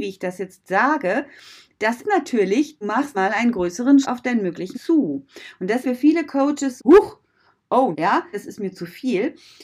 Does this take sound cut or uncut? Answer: cut